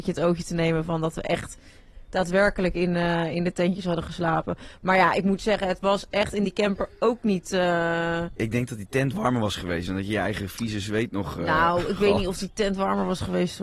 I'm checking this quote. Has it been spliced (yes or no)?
no